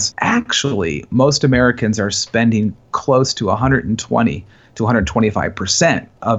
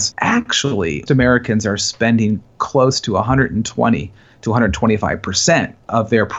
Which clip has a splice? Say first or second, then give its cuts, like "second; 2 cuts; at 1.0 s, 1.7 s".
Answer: second; 1 cut; at 1.1 s